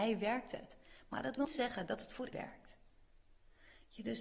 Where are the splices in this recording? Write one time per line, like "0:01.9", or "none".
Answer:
0:01.4
0:02.3